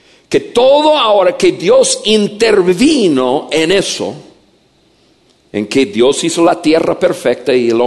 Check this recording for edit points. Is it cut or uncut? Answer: uncut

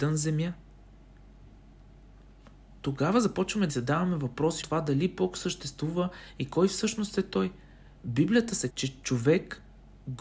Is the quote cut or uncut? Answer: cut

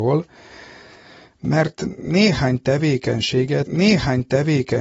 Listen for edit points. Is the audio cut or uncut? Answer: cut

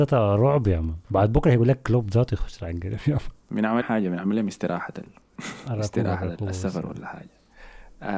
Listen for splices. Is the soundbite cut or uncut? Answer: cut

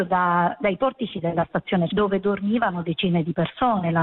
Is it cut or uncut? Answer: cut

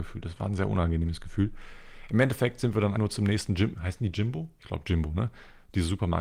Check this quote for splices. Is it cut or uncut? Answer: cut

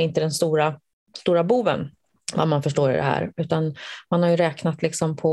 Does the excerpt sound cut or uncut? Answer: uncut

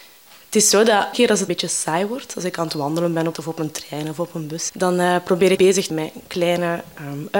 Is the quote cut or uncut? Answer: cut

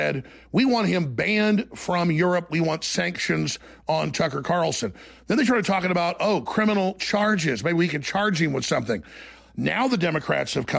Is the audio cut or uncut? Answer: uncut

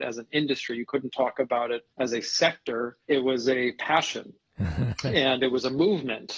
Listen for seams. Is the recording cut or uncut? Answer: cut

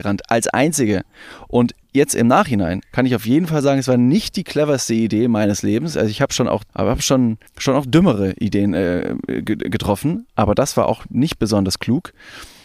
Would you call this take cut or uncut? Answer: cut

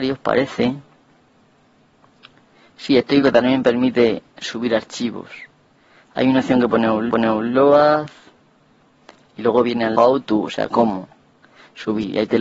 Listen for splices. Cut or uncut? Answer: cut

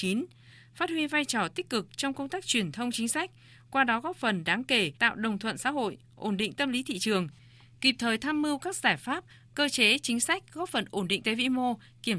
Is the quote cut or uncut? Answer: cut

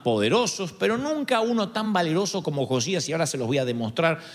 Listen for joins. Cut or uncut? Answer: uncut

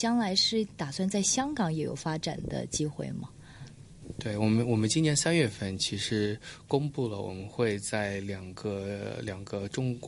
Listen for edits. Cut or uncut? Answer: uncut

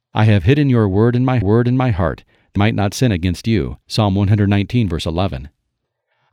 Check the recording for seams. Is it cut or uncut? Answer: cut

